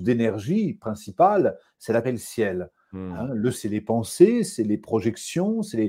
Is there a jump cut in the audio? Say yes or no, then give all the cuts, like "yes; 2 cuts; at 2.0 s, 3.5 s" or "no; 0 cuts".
yes; 2 cuts; at 2.0 s, 3.5 s